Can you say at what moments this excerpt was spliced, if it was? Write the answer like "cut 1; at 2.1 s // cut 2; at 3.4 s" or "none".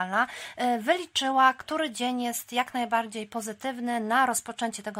none